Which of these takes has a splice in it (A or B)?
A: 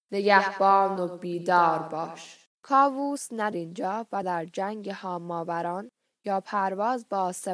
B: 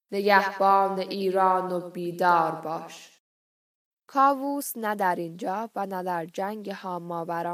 A